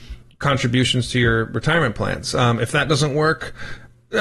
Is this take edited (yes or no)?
no